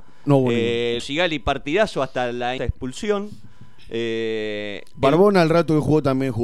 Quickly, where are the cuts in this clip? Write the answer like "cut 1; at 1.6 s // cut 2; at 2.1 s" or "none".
cut 1; at 1.0 s // cut 2; at 2.6 s